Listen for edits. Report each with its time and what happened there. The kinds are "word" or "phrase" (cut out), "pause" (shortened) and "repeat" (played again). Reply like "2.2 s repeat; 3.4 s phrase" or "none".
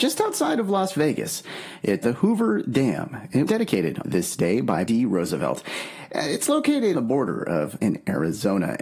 2.0 s word; 3.5 s word; 4.0 s word; 4.9 s phrase; 6.9 s word; 7.8 s word